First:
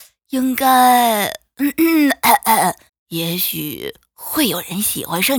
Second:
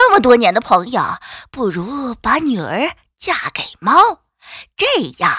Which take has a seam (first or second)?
first